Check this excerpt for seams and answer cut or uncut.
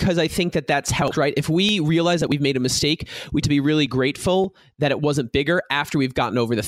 cut